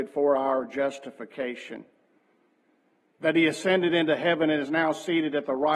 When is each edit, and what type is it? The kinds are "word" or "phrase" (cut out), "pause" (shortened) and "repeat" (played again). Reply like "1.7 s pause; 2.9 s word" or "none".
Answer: none

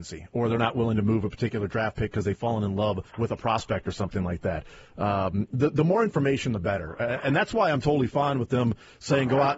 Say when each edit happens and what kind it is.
3.1 s pause

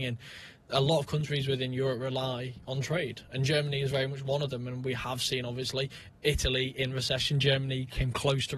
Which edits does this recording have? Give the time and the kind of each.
none

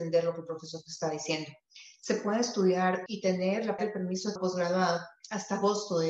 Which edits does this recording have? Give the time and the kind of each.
3.1 s word; 3.8 s word; 4.4 s word

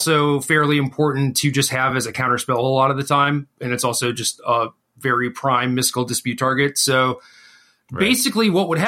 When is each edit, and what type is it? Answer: none

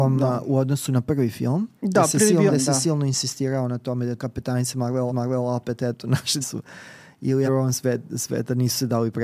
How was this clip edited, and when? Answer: 1.8 s pause; 2.5 s word; 4.2 s word; 5.1 s repeat; 6.4 s word; 7.5 s phrase

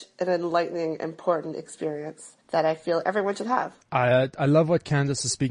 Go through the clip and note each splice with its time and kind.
2.4 s pause; 3.8 s pause

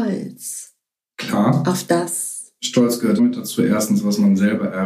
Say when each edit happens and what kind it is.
3.2 s word

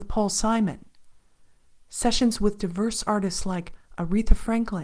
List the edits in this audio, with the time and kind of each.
none

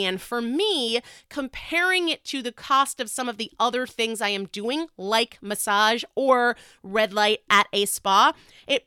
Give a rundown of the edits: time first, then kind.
none

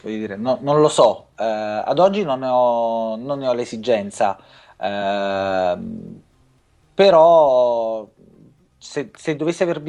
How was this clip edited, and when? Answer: none

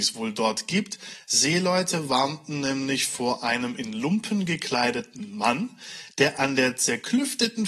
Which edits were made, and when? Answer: none

